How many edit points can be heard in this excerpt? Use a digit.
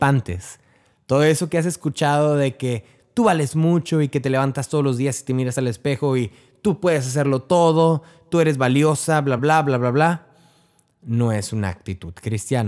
1